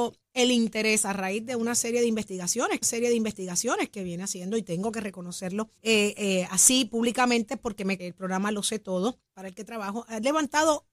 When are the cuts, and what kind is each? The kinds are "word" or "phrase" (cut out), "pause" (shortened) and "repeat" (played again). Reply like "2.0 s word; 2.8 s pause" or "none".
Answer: 2.8 s repeat; 5.8 s pause; 8.0 s phrase; 9.3 s pause